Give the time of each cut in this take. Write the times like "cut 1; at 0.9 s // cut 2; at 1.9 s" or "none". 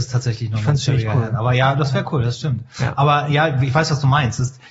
none